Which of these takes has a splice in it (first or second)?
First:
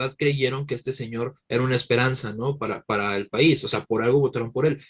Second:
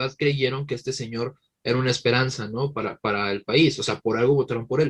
first